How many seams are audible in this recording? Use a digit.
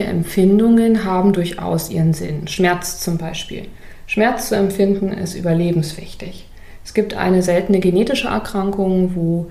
0